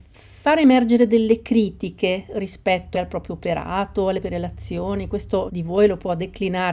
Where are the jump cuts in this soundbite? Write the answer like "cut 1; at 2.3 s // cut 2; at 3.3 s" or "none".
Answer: cut 1; at 2.9 s // cut 2; at 4.2 s // cut 3; at 5.5 s